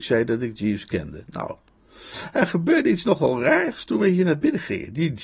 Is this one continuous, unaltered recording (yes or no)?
yes